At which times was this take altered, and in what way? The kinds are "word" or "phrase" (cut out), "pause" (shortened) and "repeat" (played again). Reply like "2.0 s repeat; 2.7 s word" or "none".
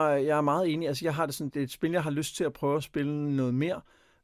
1.5 s word

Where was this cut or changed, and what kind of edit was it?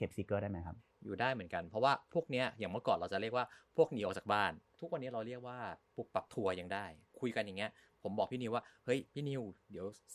9.1 s pause

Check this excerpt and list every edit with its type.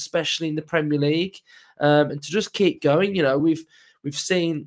none

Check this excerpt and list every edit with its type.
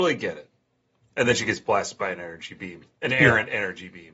none

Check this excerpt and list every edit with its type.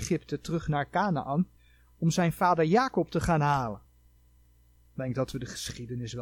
none

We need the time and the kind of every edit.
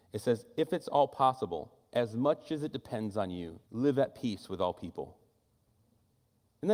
3.6 s pause

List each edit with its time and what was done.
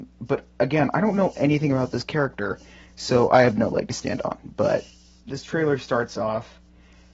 5.3 s word

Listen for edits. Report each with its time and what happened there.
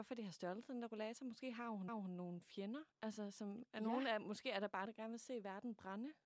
1.9 s repeat; 2.9 s pause; 4.8 s word

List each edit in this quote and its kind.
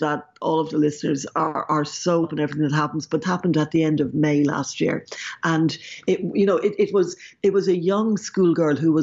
2.2 s word; 3.2 s word

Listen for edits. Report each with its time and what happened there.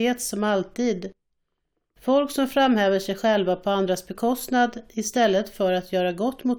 none

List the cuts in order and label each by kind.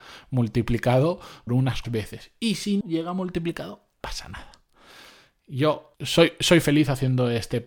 1.5 s word; 1.8 s word; 2.8 s word; 4.0 s word; 5.9 s word

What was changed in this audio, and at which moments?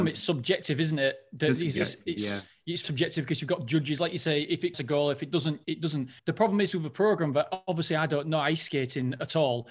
2.8 s word; 4.7 s phrase; 5.6 s word; 6.2 s pause

